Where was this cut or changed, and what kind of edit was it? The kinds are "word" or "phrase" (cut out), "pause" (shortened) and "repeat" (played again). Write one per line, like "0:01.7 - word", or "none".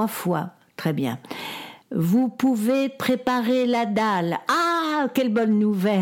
0:01.8 - pause